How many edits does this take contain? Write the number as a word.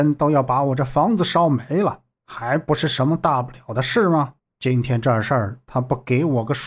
two